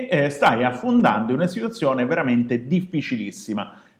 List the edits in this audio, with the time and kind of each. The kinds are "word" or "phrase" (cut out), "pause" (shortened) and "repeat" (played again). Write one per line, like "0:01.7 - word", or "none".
none